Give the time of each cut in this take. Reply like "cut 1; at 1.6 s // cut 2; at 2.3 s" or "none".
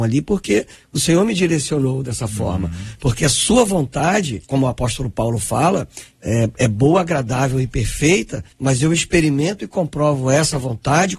cut 1; at 4.4 s // cut 2; at 8.5 s